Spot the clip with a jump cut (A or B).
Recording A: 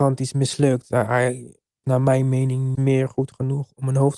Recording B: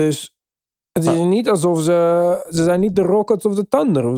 A